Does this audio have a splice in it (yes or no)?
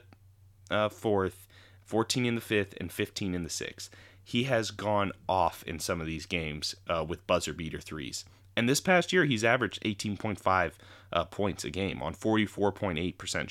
no